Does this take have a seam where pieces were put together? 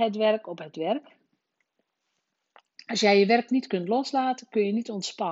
no; 0 cuts

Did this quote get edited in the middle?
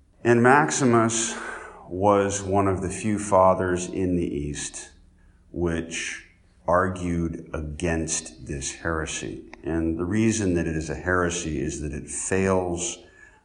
no; 0 cuts

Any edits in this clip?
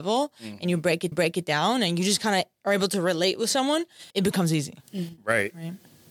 yes; 2 cuts; at 1.1 s, 4.1 s

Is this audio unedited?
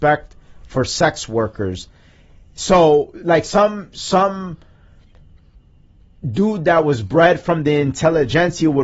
yes; 0 cuts

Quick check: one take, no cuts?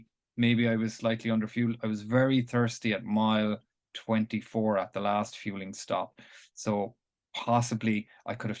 yes; 0 cuts

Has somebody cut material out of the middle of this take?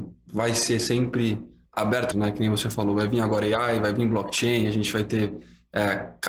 yes; 1 cut; at 2.1 s

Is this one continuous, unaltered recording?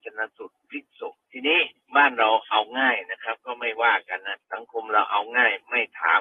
no; 2 cuts; at 1.3 s, 4.4 s

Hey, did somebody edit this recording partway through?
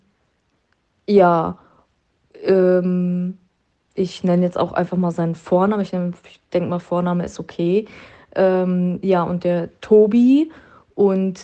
no; 0 cuts

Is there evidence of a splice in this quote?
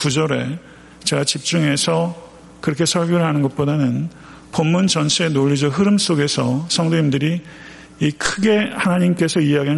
no; 0 cuts

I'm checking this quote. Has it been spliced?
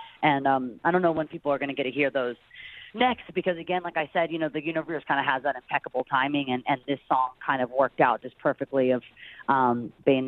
yes; 1 cut; at 2.9 s

